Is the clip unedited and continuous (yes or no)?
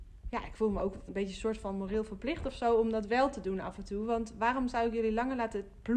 no